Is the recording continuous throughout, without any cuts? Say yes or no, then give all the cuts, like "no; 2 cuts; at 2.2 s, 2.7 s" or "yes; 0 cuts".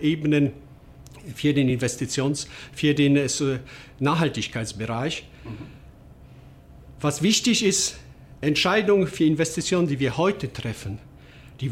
yes; 0 cuts